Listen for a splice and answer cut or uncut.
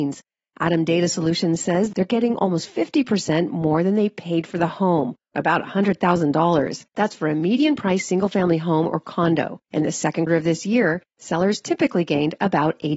cut